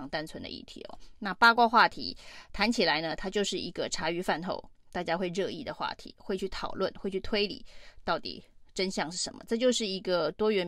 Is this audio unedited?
yes; 0 cuts

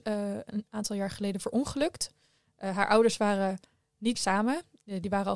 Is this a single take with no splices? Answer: no; 1 cut; at 4.2 s

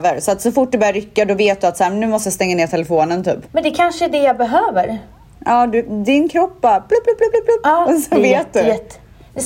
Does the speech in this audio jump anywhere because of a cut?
yes; 2 cuts; at 3.5 s, 7.3 s

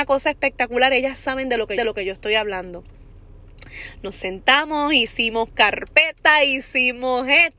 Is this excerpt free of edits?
no; 1 cut; at 1.8 s

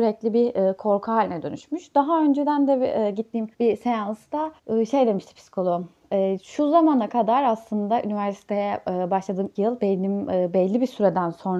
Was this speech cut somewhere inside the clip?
yes; 4 cuts; at 3.5 s, 4.6 s, 6.0 s, 9.5 s

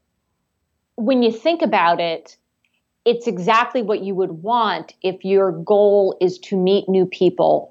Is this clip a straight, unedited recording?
yes; 0 cuts

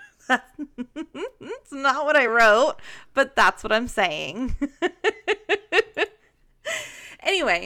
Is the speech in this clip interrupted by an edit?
no; 0 cuts

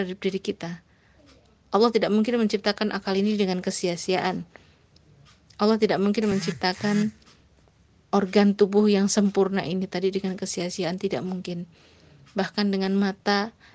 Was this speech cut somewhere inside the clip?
no; 0 cuts

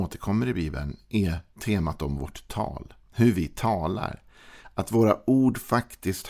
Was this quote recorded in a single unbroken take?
no; 1 cut; at 1.5 s

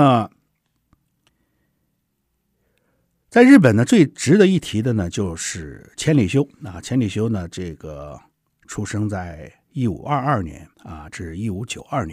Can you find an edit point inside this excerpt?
yes; 1 cut; at 10.7 s

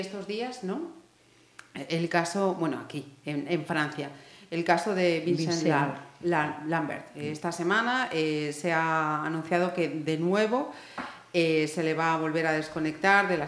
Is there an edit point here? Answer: no; 0 cuts

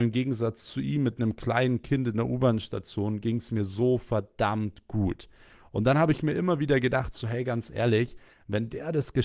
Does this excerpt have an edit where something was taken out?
no; 0 cuts

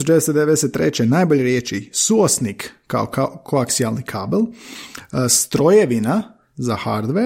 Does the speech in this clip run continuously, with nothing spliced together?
yes; 0 cuts

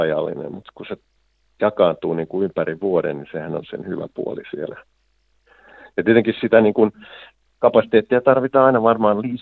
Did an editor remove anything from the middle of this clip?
no; 0 cuts

